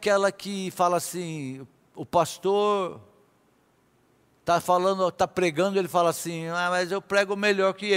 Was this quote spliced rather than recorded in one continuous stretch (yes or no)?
no